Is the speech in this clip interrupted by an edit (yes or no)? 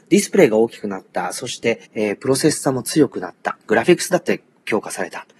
yes